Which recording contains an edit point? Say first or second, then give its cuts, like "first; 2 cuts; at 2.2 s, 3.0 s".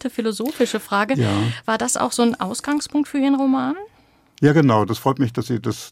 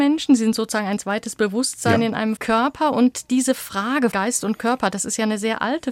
second; 2 cuts; at 2.4 s, 4.1 s